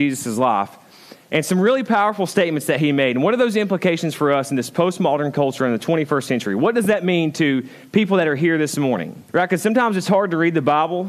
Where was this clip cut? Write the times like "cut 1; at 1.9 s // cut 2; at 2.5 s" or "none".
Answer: cut 1; at 9.3 s